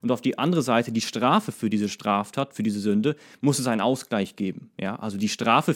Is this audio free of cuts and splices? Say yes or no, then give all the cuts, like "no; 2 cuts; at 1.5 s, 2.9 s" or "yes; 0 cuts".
yes; 0 cuts